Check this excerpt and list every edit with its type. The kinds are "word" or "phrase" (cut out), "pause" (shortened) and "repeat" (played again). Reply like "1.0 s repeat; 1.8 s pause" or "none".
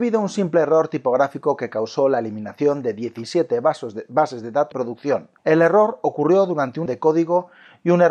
4.7 s word; 5.4 s pause; 6.9 s word

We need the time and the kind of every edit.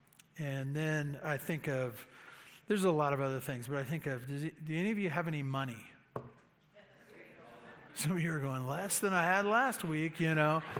7.9 s pause

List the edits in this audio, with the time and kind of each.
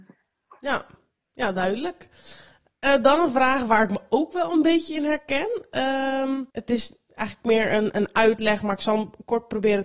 6.5 s pause

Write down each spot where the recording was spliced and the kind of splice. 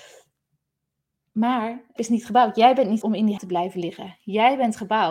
2.0 s word; 3.0 s word; 3.4 s word

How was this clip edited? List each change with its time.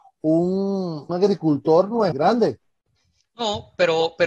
1.1 s word; 2.1 s phrase; 3.0 s pause

